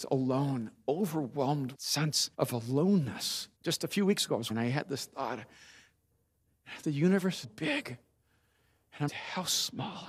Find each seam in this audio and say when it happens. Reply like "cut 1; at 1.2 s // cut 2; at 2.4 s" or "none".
cut 1; at 1.7 s // cut 2; at 2.3 s // cut 3; at 3.6 s // cut 4; at 4.5 s // cut 5; at 6.8 s // cut 6; at 7.4 s // cut 7; at 9.1 s